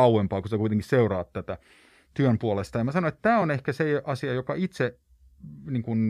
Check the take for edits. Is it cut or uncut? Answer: uncut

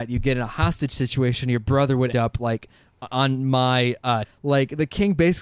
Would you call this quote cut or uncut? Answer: cut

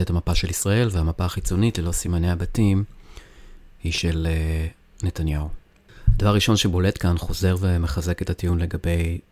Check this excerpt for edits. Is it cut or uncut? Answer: uncut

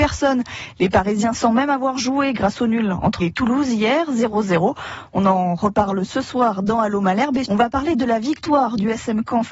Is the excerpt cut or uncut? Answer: cut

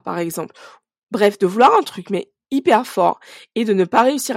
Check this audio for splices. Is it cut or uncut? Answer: uncut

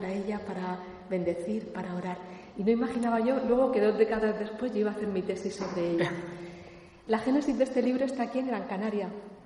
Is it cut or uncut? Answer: uncut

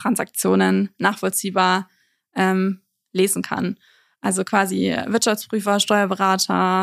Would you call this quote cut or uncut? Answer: uncut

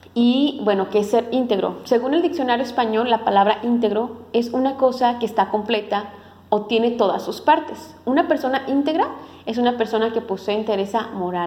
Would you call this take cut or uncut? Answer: uncut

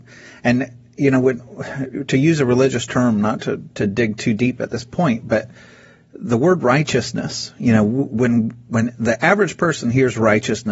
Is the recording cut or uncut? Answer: uncut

